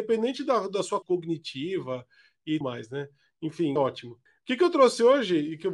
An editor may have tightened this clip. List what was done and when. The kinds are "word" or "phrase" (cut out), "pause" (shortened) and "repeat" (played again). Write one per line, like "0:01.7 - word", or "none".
0:01.0 - word
0:02.6 - word
0:03.8 - word
0:04.3 - pause